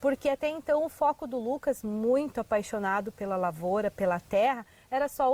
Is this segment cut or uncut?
uncut